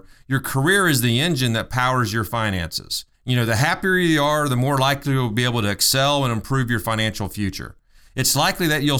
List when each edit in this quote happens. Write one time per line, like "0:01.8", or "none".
0:03.1